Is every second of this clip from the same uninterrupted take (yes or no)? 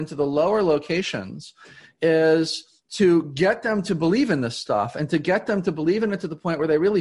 yes